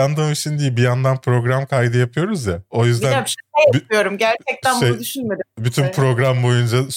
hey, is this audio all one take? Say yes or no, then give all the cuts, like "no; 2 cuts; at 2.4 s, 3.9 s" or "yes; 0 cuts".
yes; 0 cuts